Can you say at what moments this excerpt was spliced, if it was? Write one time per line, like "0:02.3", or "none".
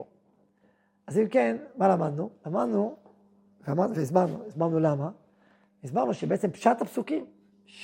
none

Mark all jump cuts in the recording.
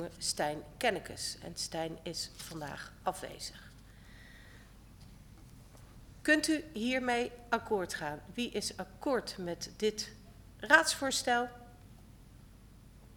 none

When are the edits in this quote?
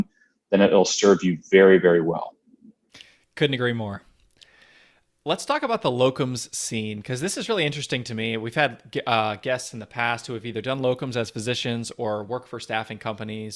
none

